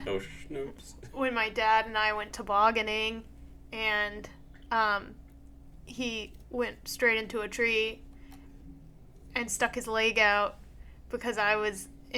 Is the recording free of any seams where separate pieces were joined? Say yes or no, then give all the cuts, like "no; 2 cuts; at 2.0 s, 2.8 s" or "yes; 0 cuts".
yes; 0 cuts